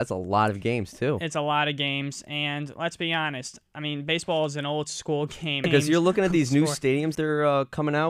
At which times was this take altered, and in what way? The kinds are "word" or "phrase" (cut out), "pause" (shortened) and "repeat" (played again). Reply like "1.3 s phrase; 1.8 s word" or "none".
7.1 s word